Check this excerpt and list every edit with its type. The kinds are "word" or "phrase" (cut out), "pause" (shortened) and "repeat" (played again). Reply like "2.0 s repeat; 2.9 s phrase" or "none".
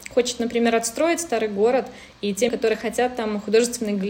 2.5 s word